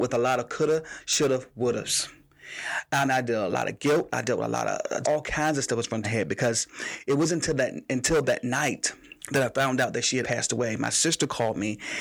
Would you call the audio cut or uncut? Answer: cut